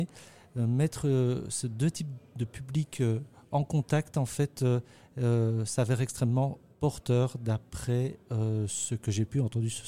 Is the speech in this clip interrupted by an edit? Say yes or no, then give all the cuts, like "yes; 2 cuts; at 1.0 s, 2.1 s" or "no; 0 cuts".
no; 0 cuts